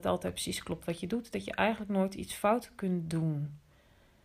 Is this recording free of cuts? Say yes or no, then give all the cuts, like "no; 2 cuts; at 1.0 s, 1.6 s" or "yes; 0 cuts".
yes; 0 cuts